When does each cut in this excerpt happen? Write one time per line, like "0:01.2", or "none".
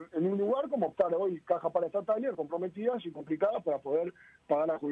0:00.9
0:02.3